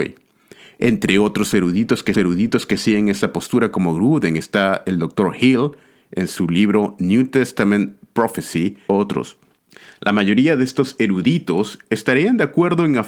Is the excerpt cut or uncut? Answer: cut